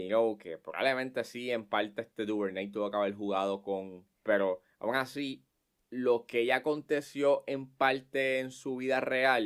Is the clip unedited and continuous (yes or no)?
no